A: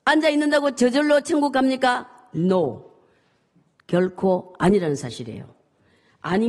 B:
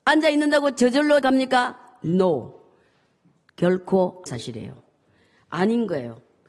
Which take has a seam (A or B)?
B